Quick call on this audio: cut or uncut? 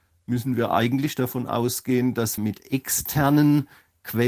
cut